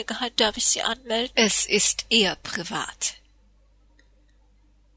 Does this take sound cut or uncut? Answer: uncut